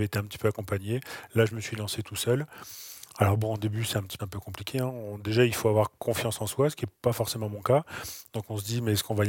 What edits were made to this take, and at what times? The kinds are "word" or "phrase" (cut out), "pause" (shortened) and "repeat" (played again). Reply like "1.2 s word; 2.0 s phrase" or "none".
4.2 s word; 6.0 s pause